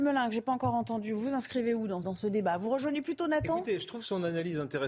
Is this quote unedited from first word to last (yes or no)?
no